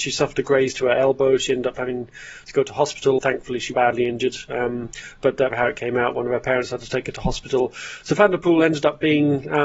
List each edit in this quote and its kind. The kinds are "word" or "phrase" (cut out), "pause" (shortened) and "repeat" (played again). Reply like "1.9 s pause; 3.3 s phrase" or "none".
3.2 s word; 3.7 s word; 5.5 s phrase